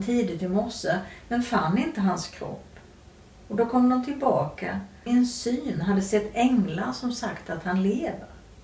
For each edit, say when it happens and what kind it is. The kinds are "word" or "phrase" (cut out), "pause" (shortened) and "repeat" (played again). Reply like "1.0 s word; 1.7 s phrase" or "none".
5.1 s phrase